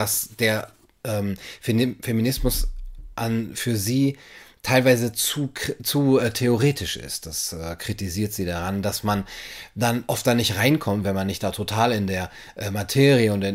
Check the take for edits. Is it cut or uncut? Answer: uncut